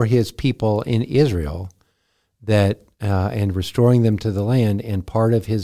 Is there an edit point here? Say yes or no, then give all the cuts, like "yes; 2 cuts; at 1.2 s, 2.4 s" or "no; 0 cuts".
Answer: no; 0 cuts